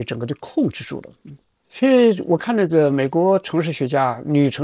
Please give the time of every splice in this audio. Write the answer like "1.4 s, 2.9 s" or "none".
1.6 s